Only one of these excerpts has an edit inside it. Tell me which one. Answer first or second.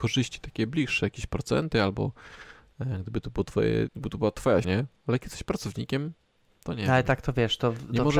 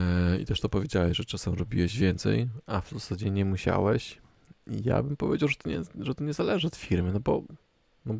first